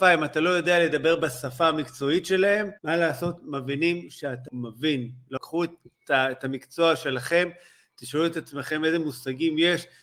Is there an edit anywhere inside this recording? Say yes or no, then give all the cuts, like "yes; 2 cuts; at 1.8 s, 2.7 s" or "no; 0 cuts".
yes; 3 cuts; at 2.8 s, 4.5 s, 5.4 s